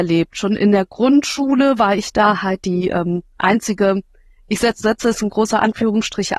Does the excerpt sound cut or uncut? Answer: uncut